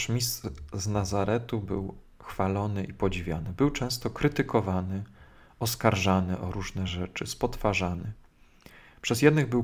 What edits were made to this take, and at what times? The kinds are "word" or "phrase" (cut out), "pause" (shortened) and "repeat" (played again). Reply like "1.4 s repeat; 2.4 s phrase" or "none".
none